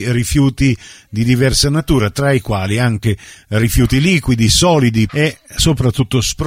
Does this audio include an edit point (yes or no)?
yes